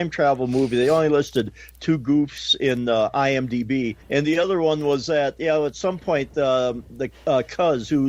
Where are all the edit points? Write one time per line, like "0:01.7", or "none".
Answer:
0:04.0